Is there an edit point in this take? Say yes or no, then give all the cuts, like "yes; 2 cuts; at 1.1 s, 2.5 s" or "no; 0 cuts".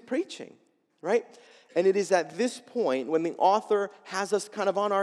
no; 0 cuts